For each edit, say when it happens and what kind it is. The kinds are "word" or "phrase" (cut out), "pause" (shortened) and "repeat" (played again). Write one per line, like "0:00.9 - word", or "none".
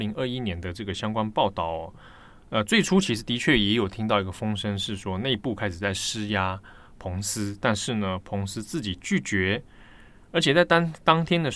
none